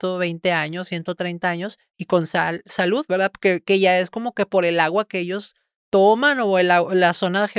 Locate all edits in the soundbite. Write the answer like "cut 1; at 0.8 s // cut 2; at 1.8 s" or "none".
none